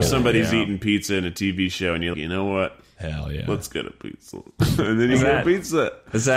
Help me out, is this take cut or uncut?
cut